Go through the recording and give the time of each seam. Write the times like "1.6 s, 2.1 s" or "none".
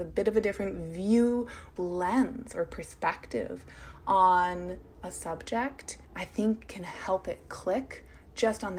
1.8 s, 6.0 s